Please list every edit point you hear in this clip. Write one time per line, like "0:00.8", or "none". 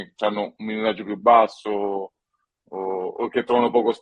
none